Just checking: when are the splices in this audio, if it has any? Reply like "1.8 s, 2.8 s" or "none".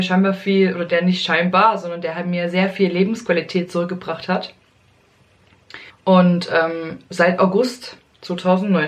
5.9 s